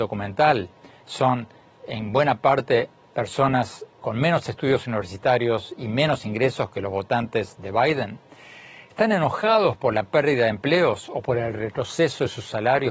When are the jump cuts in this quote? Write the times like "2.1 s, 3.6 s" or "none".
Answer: none